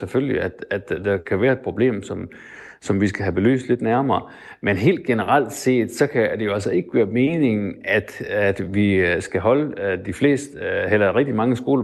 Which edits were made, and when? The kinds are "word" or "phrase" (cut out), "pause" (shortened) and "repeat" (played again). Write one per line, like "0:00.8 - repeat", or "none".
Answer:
none